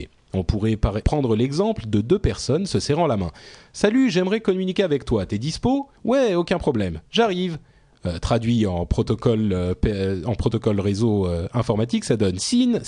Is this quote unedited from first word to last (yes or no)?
no